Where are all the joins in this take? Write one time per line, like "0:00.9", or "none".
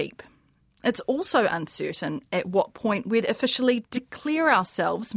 none